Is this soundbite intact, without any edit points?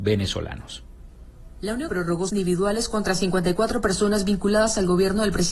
no; 2 cuts; at 1.9 s, 2.3 s

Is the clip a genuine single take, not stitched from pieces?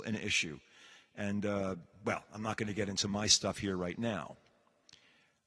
yes; 0 cuts

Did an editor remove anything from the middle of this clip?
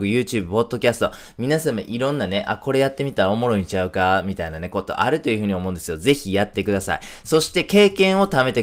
no; 0 cuts

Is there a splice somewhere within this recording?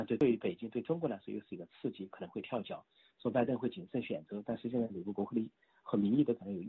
no; 0 cuts

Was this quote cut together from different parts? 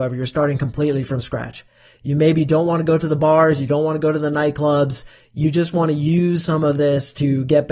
no; 0 cuts

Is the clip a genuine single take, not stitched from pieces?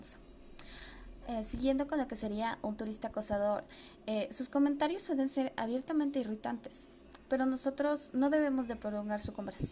yes; 0 cuts

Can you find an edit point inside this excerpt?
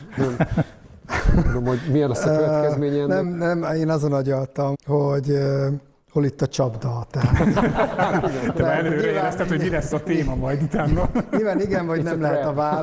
yes; 4 cuts; at 3.2 s, 4.7 s, 8.9 s, 9.9 s

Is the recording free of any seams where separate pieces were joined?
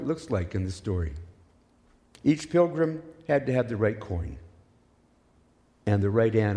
yes; 0 cuts

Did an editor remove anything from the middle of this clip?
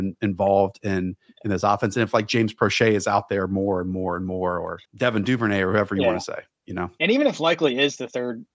yes; 1 cut; at 4.9 s

